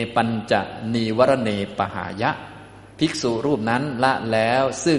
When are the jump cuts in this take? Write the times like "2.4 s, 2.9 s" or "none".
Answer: 2.9 s